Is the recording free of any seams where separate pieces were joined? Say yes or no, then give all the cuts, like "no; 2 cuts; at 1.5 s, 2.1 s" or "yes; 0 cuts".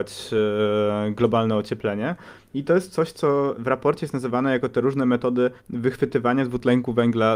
no; 1 cut; at 5.6 s